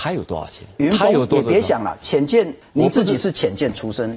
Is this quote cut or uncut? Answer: cut